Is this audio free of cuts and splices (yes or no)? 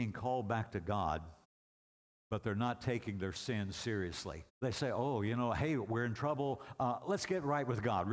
no